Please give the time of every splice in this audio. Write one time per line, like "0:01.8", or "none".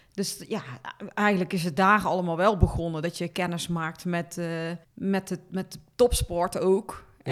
0:04.8